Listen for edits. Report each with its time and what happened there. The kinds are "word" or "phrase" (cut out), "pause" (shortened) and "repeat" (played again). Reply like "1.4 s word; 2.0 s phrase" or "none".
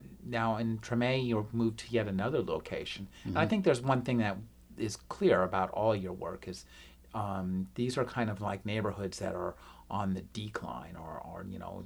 none